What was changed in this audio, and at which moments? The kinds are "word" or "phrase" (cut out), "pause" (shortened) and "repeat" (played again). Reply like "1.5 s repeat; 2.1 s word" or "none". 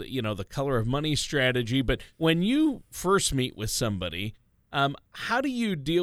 2.1 s pause; 5.1 s pause